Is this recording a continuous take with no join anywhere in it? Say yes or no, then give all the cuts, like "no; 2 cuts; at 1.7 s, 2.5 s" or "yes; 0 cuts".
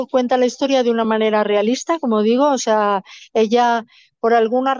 yes; 0 cuts